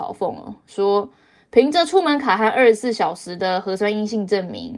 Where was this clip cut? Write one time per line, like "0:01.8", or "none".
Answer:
none